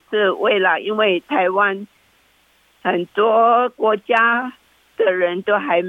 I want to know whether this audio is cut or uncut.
uncut